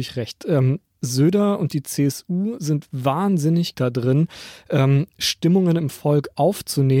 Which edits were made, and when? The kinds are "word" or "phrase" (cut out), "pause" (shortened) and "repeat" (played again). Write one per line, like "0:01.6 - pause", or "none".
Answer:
0:03.7 - word